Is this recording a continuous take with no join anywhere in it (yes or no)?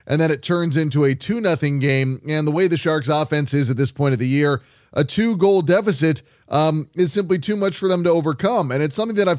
yes